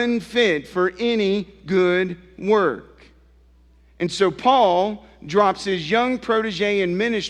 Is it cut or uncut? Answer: uncut